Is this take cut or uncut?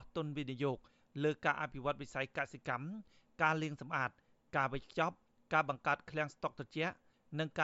uncut